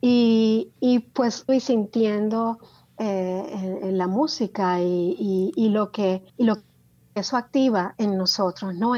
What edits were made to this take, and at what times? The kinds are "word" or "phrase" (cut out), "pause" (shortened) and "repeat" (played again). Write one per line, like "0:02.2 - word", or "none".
0:01.5 - word
0:06.3 - pause